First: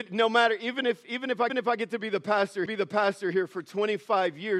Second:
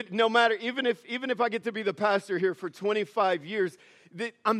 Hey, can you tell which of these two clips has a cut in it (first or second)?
first